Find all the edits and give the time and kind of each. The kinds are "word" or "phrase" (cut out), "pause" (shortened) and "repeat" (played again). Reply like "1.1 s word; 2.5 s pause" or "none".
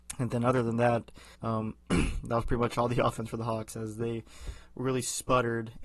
1.3 s pause